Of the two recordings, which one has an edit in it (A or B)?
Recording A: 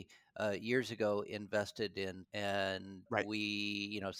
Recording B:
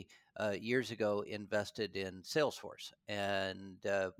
A